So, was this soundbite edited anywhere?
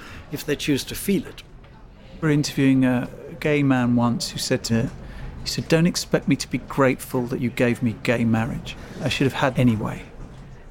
yes; 3 cuts; at 2.2 s, 4.7 s, 9.5 s

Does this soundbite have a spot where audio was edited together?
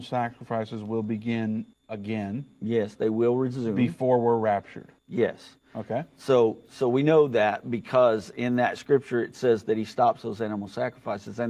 yes; 2 cuts; at 1.7 s, 5.0 s

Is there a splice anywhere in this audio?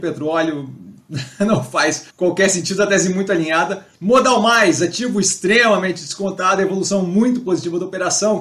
yes; 2 cuts; at 2.1 s, 3.9 s

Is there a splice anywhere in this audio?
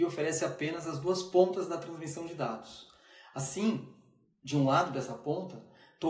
no; 0 cuts

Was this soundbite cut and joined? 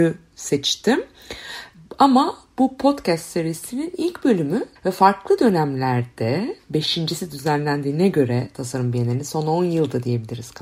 yes; 1 cut; at 4.8 s

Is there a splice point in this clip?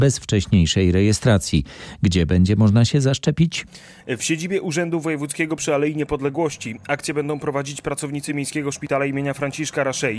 no; 0 cuts

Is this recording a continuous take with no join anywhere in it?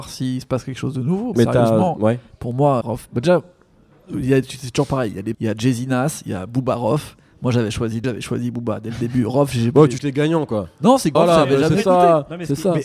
no; 6 cuts; at 1.3 s, 2.8 s, 5.3 s, 8.0 s, 10.0 s, 11.1 s

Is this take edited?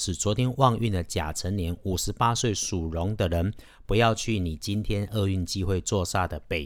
no; 0 cuts

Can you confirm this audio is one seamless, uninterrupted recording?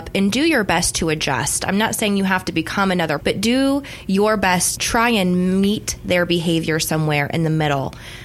no; 2 cuts; at 3.2 s, 4.7 s

